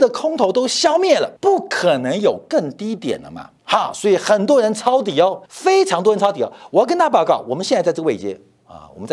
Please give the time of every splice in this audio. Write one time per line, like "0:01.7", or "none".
0:01.4
0:03.6
0:05.5